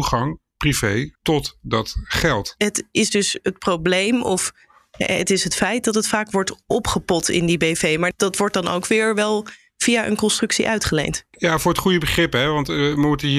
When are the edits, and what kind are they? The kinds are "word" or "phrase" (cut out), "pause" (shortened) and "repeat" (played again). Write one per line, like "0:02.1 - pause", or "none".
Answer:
0:01.1 - pause